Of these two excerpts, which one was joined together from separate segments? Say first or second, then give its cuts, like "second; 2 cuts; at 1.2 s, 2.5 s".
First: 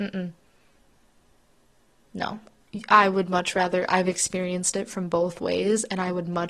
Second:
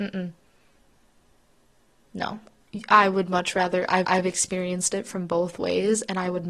second; 1 cut; at 4.0 s